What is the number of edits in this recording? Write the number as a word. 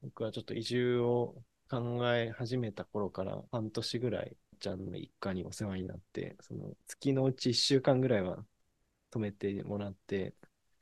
three